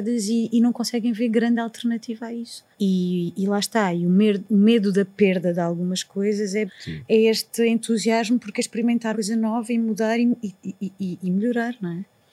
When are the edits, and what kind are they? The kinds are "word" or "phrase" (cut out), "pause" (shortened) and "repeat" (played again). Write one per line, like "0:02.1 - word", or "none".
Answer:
0:02.7 - pause
0:06.7 - phrase
0:09.1 - word